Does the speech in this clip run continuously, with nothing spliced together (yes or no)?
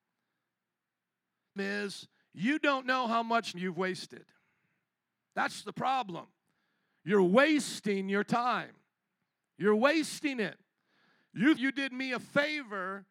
no